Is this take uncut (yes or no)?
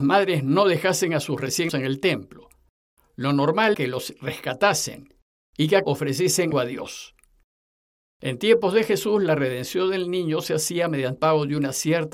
no